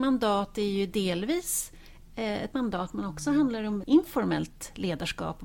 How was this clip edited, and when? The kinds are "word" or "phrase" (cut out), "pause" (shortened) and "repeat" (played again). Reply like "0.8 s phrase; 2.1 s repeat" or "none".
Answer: 2.5 s word; 3.8 s word